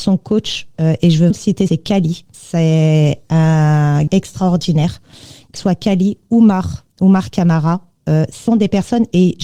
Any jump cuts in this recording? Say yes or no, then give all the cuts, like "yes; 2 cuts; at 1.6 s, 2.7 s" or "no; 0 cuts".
yes; 6 cuts; at 1.3 s, 1.7 s, 4.1 s, 5.6 s, 6.9 s, 8.5 s